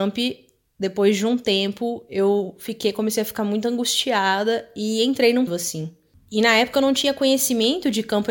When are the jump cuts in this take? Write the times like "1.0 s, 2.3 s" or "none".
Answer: 5.5 s